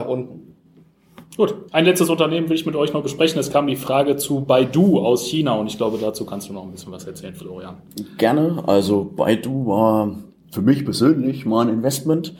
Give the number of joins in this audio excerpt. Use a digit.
1